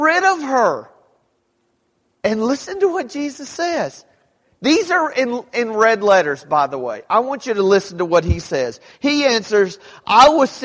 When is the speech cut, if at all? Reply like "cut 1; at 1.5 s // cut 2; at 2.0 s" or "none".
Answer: none